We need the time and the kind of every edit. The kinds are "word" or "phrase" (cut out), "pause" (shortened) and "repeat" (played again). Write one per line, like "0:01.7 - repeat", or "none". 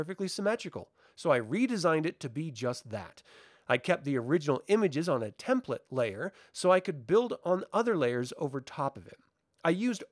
none